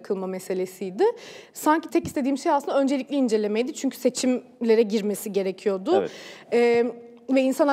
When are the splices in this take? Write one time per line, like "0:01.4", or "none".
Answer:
0:01.9